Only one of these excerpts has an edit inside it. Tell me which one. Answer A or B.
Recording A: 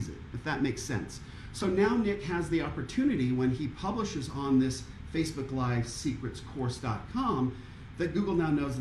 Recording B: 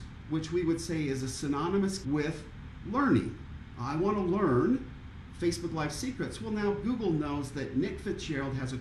B